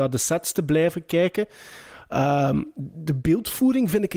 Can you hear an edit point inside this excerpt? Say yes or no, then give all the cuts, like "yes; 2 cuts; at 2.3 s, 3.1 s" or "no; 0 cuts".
no; 0 cuts